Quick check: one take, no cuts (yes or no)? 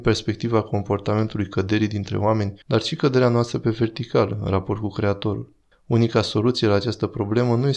no